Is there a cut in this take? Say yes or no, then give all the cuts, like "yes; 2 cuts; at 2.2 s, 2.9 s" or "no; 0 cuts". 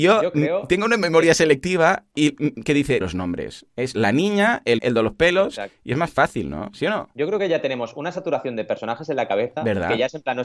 yes; 2 cuts; at 3.0 s, 4.8 s